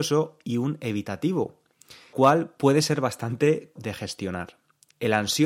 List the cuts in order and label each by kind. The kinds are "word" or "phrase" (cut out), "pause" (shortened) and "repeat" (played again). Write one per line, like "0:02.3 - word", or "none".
0:02.1 - word
0:03.8 - word